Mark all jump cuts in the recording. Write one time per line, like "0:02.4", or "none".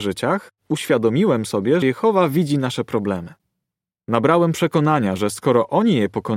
0:01.8